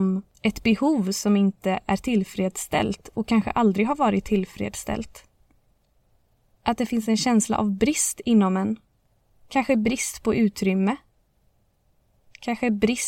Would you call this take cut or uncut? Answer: uncut